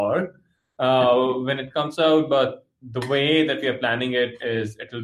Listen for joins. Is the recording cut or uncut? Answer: uncut